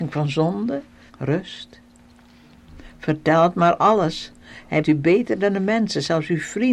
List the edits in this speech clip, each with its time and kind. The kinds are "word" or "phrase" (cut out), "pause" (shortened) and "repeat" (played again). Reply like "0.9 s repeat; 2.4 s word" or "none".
1.1 s word; 4.8 s word